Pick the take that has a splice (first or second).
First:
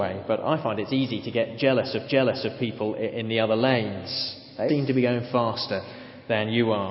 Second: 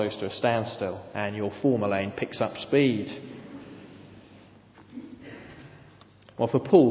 first